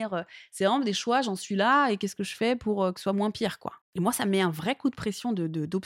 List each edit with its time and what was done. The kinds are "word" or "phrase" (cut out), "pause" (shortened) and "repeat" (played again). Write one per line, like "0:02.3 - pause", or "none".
0:03.8 - pause